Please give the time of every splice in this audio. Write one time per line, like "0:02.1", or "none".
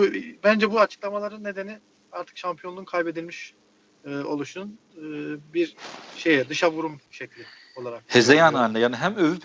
none